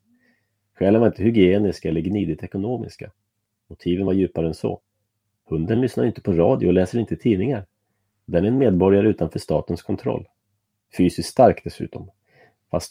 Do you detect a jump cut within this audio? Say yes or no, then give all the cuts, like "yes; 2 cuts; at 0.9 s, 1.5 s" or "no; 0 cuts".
no; 0 cuts